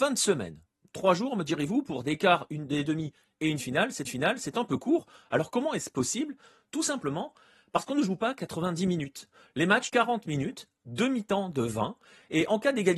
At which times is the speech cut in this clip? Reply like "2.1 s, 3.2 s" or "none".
4.1 s, 9.9 s